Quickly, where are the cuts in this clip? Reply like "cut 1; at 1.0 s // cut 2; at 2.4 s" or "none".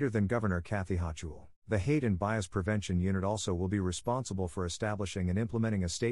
cut 1; at 1.6 s